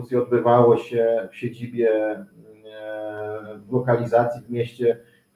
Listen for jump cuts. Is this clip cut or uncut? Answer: uncut